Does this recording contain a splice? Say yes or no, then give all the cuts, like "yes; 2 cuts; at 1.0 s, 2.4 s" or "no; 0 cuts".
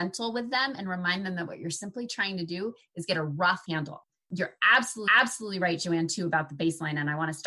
yes; 1 cut; at 5.1 s